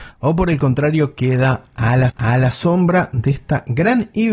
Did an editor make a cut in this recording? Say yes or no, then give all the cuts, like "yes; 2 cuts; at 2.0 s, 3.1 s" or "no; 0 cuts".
yes; 1 cut; at 2.1 s